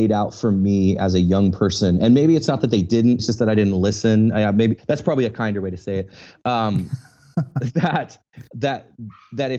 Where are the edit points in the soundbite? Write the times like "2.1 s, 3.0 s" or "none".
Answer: 3.2 s, 4.8 s, 8.5 s